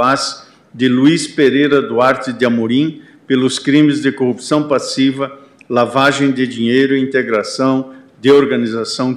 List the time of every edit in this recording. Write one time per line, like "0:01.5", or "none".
none